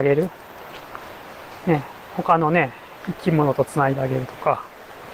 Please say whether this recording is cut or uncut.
uncut